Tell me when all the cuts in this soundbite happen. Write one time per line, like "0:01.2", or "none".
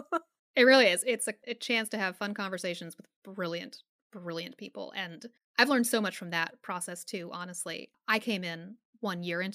0:01.0
0:05.4

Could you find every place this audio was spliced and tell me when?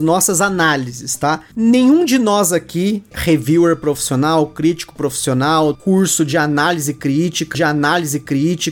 0:03.1
0:05.8
0:07.5

